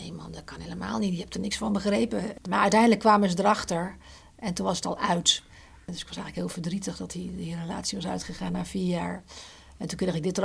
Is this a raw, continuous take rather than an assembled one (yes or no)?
yes